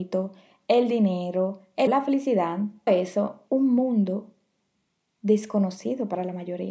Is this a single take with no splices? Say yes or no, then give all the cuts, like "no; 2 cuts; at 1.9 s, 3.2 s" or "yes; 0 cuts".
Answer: no; 3 cuts; at 1.9 s, 2.9 s, 3.5 s